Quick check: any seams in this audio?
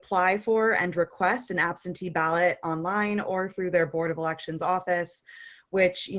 no; 0 cuts

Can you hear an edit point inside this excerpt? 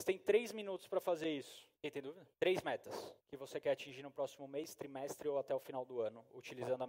yes; 3 cuts; at 1.7 s, 2.3 s, 3.2 s

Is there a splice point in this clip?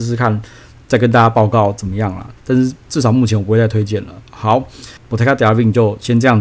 yes; 1 cut; at 5.0 s

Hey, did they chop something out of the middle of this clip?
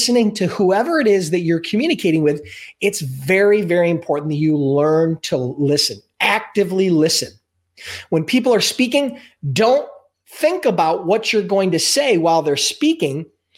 no; 0 cuts

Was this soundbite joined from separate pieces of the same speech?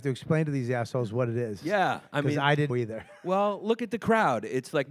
yes; 1 cut; at 2.7 s

